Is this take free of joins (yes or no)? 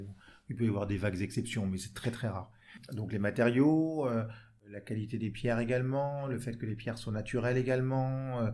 yes